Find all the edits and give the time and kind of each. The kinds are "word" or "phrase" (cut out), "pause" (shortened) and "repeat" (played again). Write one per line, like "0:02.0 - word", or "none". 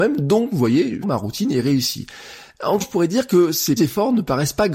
0:01.0 - word
0:02.8 - word
0:03.8 - word

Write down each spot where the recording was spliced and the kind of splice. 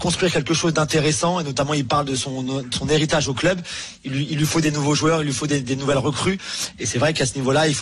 none

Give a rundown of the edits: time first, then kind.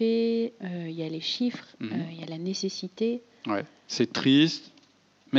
none

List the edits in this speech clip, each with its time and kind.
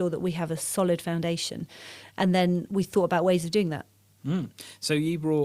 none

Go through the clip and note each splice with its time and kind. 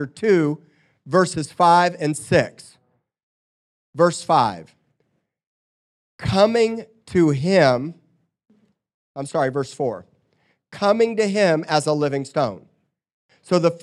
none

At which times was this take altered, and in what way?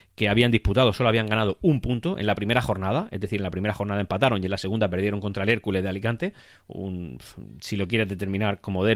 none

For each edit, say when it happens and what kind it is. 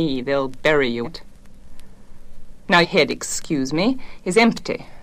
0:01.0 - word
0:02.8 - word

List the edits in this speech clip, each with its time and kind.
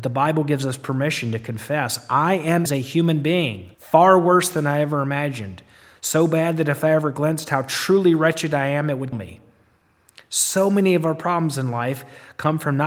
0:02.7 - phrase
0:03.7 - pause
0:09.1 - word

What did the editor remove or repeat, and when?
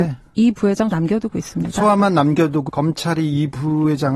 0:00.9 - word
0:02.7 - word

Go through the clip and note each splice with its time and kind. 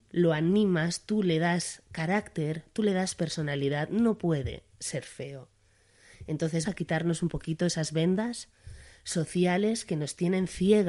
0:06.6 - word

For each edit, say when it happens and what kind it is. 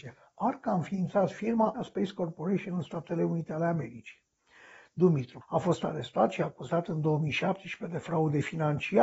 0:01.7 - word
0:05.4 - word

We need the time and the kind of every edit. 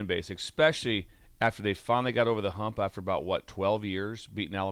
none

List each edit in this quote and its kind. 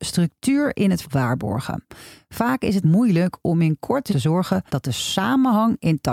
0:01.0 - word
0:02.8 - word
0:04.1 - phrase
0:04.7 - pause

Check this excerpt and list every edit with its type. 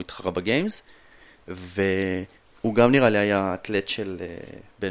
none

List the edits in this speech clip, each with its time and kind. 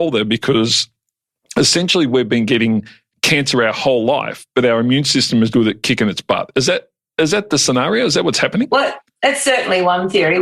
0:05.5 - word

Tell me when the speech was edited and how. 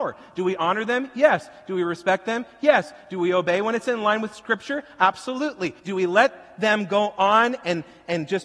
0:05.8 - pause

